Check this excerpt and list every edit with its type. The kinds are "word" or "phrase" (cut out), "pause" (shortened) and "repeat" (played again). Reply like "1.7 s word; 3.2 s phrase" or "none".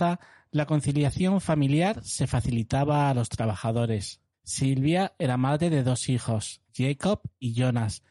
4.3 s pause; 6.7 s pause